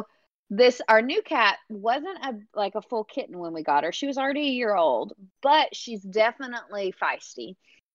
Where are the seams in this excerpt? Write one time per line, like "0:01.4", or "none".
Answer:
none